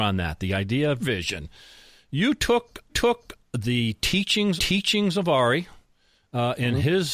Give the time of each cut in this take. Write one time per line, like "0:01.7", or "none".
0:01.0
0:02.9
0:04.6